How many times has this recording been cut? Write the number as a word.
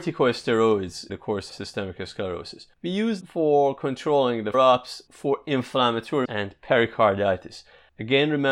six